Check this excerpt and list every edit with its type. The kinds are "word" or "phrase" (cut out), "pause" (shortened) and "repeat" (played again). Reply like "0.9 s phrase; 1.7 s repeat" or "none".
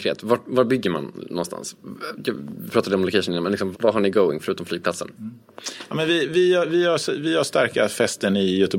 3.7 s word